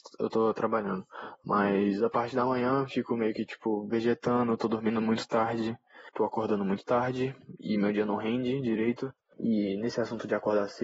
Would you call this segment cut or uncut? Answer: uncut